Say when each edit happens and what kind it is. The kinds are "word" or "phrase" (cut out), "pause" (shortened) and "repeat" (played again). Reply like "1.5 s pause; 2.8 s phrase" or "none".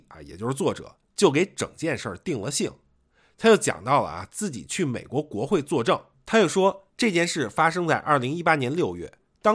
6.1 s pause; 6.9 s pause